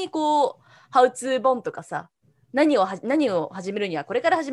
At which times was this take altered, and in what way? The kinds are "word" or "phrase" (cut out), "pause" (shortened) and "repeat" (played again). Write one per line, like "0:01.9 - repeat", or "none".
none

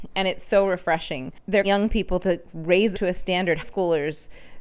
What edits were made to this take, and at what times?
0:01.6 - word
0:02.9 - word
0:03.6 - word

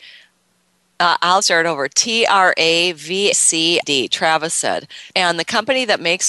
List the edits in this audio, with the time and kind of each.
0:01.4 - word
0:03.3 - word
0:03.8 - word
0:05.1 - pause

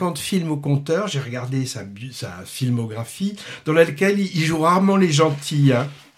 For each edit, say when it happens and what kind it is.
none

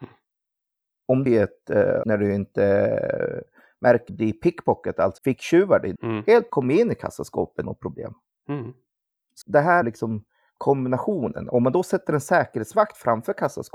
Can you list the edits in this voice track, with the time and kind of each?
0:01.3 - word
0:02.0 - word
0:04.1 - word
0:05.2 - word
0:06.0 - word
0:06.5 - word
0:07.6 - word
0:09.4 - word
0:09.8 - word

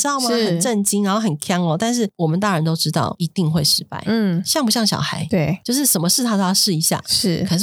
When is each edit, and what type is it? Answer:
none

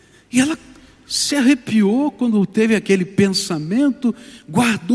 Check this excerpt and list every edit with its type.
none

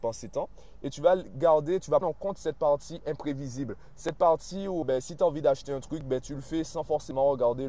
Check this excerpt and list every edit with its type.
0:02.0 - word
0:04.8 - word

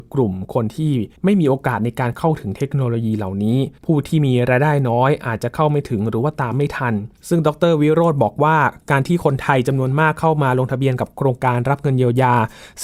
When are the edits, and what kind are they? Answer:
0:01.2 - pause
0:03.8 - pause
0:07.2 - pause

